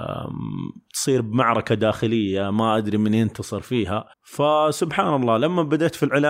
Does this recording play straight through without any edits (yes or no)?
no